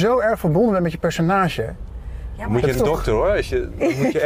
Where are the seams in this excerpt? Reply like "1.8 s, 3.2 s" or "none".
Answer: 2.7 s